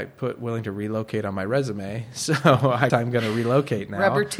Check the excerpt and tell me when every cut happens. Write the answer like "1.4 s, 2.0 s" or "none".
2.9 s